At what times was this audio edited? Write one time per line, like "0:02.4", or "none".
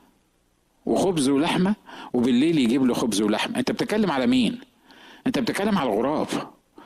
none